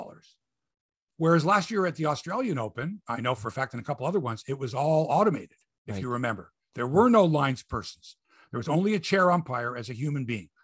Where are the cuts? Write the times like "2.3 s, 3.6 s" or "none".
none